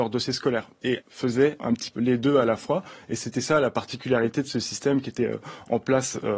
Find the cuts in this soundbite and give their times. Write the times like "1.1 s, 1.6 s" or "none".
1.0 s, 1.6 s, 1.9 s